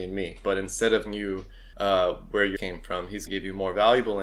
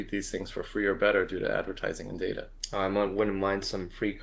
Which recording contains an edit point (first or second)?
first